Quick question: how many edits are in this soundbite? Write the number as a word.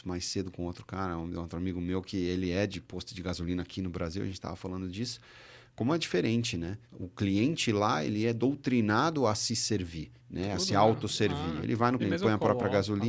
three